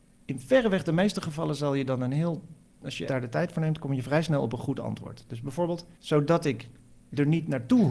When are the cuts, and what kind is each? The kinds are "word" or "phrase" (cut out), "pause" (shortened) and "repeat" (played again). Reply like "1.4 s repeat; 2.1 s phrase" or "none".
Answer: 3.1 s word; 5.9 s pause